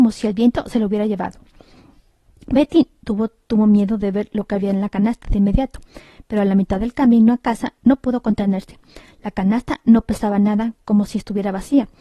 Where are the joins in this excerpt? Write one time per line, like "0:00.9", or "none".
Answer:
none